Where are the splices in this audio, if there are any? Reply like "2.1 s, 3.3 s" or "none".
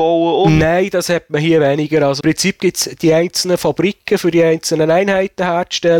2.2 s